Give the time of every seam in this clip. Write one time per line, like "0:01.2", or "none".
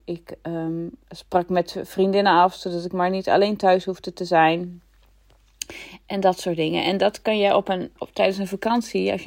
0:08.0